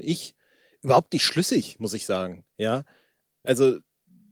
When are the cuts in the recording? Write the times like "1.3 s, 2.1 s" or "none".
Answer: none